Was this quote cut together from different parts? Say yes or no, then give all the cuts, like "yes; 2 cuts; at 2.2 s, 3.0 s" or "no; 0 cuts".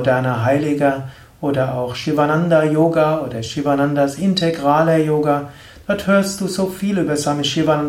no; 0 cuts